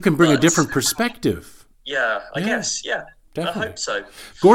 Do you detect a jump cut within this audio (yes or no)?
yes